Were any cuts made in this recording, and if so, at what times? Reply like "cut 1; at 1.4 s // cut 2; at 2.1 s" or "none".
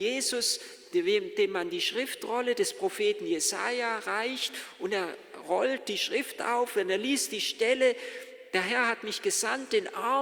none